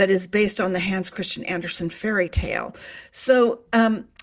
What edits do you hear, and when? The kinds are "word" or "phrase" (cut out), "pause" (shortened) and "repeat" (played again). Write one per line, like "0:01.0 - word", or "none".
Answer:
none